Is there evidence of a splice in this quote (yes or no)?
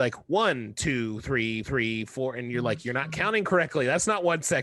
yes